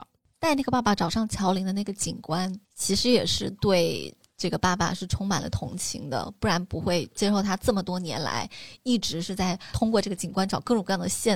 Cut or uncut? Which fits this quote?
cut